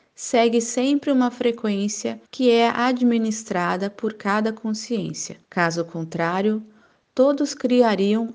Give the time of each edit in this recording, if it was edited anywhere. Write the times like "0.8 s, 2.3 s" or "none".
2.2 s, 5.4 s